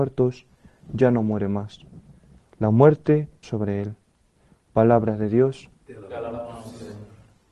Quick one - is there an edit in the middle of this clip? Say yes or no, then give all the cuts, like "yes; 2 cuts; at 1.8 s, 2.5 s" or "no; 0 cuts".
yes; 1 cut; at 3.4 s